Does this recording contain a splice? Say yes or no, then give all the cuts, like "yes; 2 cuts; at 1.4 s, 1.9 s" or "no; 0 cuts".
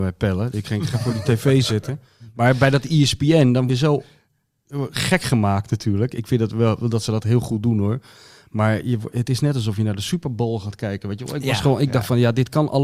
yes; 2 cuts; at 0.9 s, 3.7 s